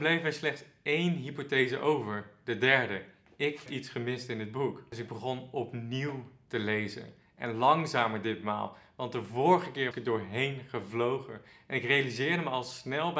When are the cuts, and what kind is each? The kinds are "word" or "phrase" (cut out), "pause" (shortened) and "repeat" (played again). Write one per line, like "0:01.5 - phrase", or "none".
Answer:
0:03.7 - word
0:09.9 - word